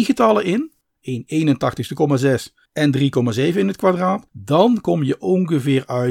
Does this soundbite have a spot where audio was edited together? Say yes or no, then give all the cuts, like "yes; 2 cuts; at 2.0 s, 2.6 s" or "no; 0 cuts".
yes; 2 cuts; at 2.6 s, 4.3 s